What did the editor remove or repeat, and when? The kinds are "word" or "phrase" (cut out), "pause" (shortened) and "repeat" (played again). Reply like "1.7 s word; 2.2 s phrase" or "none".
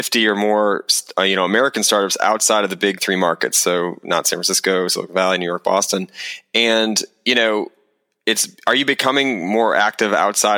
none